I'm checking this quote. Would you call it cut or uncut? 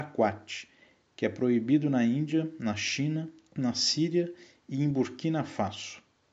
uncut